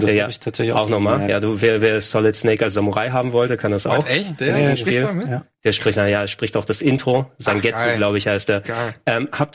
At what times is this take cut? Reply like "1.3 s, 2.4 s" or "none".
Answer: none